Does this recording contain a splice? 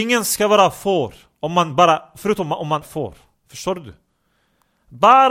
yes; 1 cut; at 2.8 s

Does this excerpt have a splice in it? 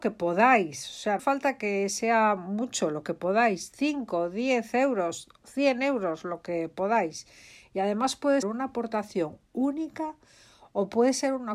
yes; 2 cuts; at 1.2 s, 8.4 s

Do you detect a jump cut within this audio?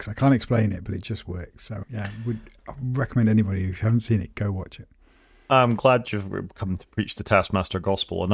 no; 0 cuts

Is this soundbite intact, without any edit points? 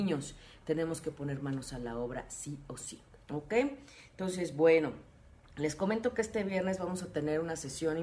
yes; 0 cuts

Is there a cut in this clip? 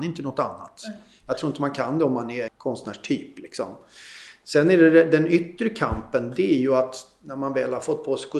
yes; 1 cut; at 2.5 s

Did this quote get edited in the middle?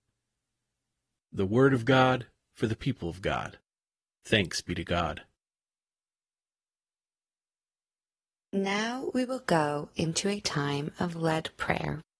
no; 0 cuts

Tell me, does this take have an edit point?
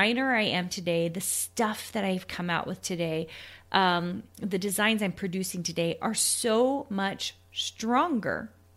no; 0 cuts

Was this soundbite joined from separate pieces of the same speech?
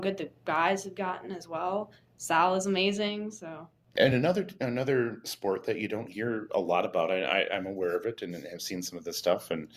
no; 0 cuts

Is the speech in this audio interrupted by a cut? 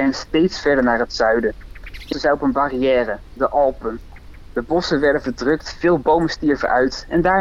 yes; 1 cut; at 2.1 s

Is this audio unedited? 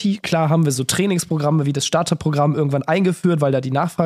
yes; 0 cuts

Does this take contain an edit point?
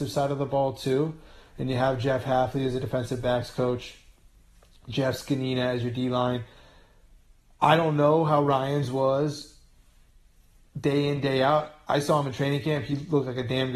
no; 0 cuts

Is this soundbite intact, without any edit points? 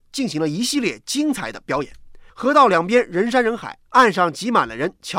no; 1 cut; at 2.3 s

